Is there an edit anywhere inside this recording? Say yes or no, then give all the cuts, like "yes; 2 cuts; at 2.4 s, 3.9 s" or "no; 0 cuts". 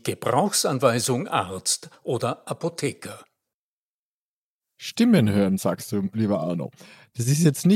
no; 0 cuts